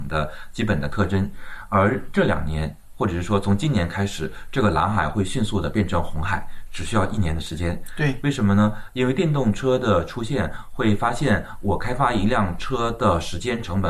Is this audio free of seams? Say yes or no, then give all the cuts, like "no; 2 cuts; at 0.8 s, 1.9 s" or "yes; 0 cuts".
yes; 0 cuts